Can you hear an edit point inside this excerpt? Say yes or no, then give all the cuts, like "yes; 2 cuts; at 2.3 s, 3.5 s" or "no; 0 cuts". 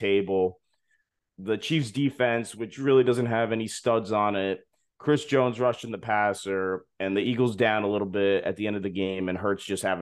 no; 0 cuts